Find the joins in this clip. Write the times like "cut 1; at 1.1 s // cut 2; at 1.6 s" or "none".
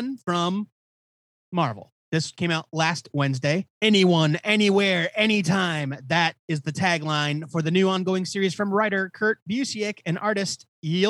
cut 1; at 2.0 s // cut 2; at 3.7 s